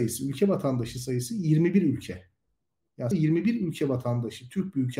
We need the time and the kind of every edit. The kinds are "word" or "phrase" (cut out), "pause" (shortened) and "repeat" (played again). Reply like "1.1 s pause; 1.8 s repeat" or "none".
3.1 s word